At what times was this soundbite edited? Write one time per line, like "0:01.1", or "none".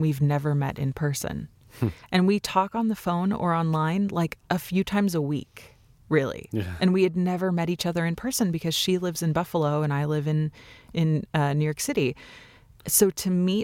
none